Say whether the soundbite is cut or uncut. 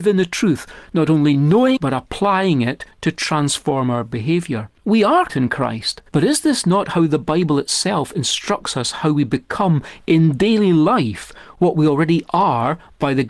cut